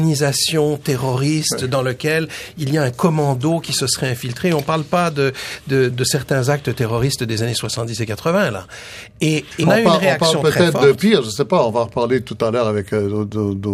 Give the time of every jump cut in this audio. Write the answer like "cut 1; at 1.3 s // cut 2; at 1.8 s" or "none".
cut 1; at 5.9 s // cut 2; at 9.6 s